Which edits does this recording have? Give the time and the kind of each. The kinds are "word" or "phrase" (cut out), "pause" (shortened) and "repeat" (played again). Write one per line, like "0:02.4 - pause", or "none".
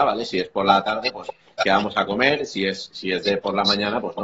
none